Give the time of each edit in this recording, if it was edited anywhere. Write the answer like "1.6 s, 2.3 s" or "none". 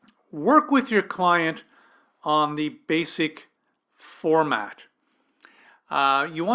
none